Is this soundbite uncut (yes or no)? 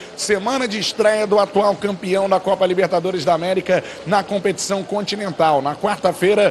yes